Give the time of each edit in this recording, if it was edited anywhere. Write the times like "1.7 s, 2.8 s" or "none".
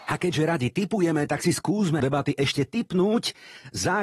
2.0 s